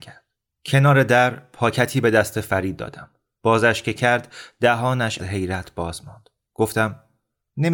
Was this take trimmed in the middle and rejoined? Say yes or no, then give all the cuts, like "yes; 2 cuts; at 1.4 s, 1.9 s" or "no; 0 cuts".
yes; 1 cut; at 5.2 s